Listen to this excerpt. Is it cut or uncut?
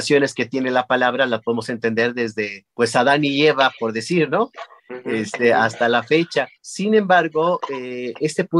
cut